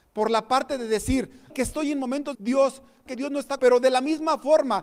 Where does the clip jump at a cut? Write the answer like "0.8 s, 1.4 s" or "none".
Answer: 1.5 s, 2.3 s, 3.1 s, 3.6 s